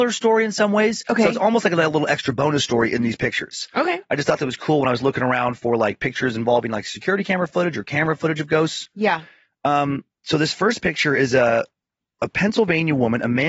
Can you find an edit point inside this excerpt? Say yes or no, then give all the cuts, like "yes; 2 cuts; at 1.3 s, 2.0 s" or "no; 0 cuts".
no; 0 cuts